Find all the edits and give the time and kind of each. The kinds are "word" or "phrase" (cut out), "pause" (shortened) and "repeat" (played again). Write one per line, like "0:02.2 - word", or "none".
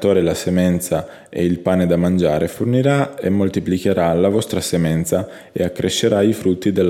none

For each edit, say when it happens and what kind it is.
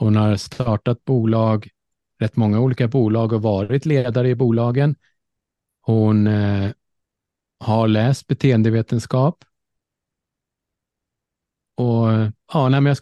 none

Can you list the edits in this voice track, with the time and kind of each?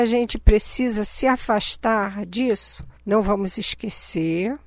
0:03.0 - pause

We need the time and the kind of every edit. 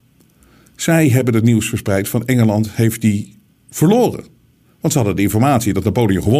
0:03.7 - word

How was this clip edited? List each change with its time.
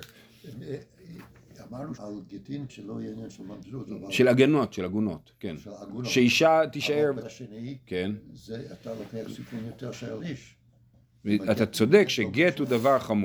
0:02.0 - word
0:02.7 - word
0:07.2 - word
0:10.2 - word

